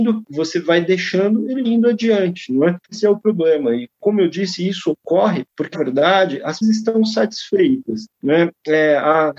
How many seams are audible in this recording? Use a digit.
3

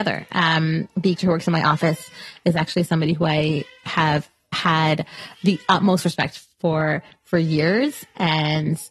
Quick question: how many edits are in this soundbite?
1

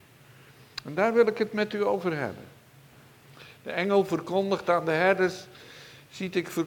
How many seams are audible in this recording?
0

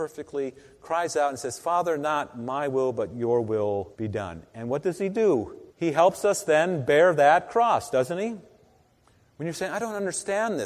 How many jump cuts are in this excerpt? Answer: 3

